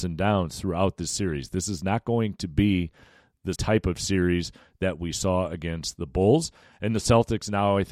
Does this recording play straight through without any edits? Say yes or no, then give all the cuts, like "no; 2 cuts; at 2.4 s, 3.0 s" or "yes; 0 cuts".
no; 1 cut; at 3.5 s